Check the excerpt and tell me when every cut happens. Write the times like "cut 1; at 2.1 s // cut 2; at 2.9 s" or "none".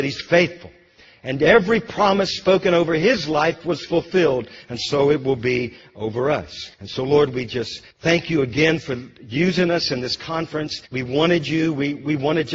cut 1; at 6.7 s // cut 2; at 7.9 s // cut 3; at 10.9 s